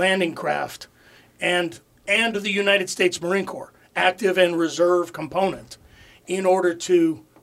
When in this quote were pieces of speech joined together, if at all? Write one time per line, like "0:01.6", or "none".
none